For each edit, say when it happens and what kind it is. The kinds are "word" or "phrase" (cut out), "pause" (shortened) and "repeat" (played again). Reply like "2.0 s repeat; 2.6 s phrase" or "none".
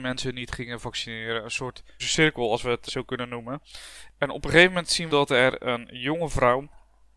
2.0 s word; 2.9 s word; 5.1 s word